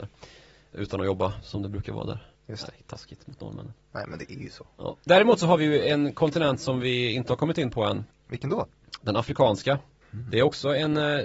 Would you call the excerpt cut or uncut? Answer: cut